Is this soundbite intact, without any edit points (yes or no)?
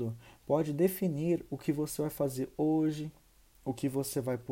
yes